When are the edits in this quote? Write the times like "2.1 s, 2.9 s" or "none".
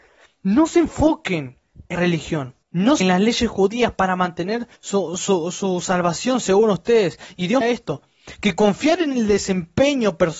1.9 s, 2.6 s, 3.0 s, 4.8 s, 7.6 s